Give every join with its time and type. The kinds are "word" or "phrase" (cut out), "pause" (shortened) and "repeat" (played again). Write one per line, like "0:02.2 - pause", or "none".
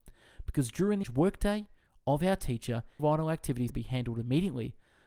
0:01.0 - word
0:03.0 - word
0:03.7 - word